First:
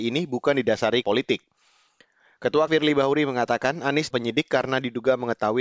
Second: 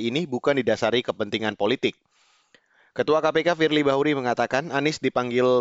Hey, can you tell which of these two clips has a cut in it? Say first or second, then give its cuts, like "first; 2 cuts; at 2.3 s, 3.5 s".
first; 3 cuts; at 1.0 s, 2.7 s, 4.1 s